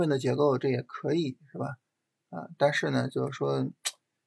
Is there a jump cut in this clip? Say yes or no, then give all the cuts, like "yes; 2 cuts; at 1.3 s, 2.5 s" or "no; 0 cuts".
no; 0 cuts